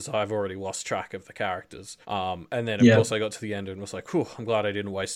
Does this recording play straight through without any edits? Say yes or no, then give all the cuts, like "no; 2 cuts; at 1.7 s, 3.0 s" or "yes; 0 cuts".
no; 1 cut; at 2.0 s